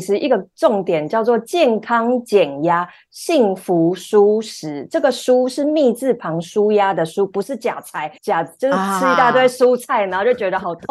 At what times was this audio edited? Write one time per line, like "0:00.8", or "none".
0:08.2